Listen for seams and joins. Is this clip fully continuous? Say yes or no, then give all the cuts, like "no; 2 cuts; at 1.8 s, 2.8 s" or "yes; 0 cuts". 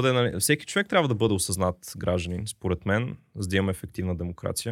yes; 0 cuts